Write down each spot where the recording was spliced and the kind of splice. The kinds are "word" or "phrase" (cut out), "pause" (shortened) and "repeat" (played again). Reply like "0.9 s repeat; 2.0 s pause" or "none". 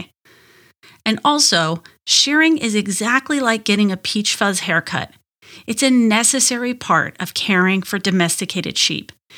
none

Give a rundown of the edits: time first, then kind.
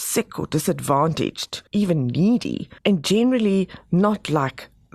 1.7 s pause; 2.8 s pause

